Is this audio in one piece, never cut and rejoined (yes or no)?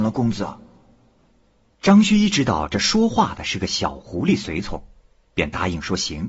yes